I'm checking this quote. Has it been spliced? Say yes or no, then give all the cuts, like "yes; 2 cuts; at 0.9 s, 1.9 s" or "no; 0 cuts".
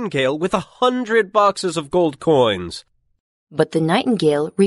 no; 0 cuts